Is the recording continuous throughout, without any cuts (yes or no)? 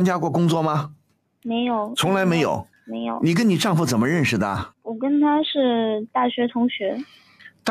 no